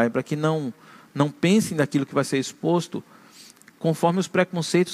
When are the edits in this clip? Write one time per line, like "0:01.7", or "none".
none